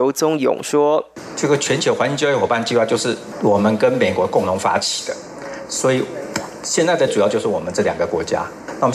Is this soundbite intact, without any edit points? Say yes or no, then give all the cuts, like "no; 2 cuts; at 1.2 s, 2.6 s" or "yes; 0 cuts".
no; 1 cut; at 7.1 s